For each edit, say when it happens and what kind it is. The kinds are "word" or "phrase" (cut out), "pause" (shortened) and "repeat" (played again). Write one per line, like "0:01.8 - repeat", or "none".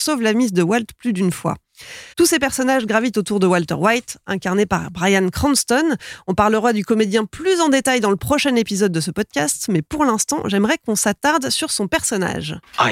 0:02.1 - pause